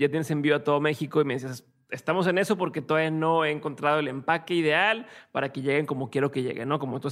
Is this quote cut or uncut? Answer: cut